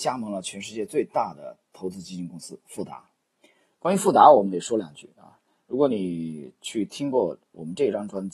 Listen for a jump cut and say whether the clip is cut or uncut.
uncut